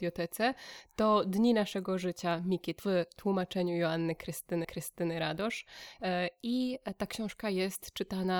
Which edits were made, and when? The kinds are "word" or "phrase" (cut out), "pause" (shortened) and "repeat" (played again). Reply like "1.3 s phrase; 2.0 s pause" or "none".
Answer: 2.8 s word; 4.6 s repeat